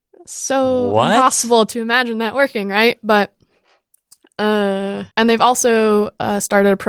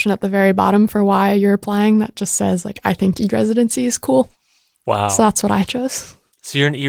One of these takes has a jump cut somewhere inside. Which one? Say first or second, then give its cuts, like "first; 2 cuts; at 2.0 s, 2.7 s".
first; 1 cut; at 5.1 s